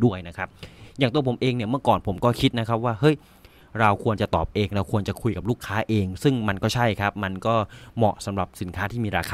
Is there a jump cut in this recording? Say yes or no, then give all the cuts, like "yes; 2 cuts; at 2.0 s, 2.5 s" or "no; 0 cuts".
no; 0 cuts